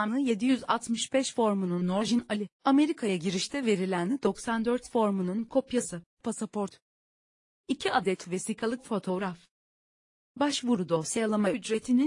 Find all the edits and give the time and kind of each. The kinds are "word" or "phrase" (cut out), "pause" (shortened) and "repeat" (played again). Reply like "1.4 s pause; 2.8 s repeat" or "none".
2.5 s pause; 6.1 s pause